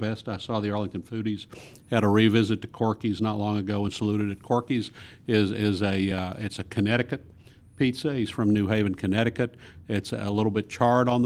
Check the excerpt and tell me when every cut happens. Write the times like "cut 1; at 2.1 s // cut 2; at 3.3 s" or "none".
none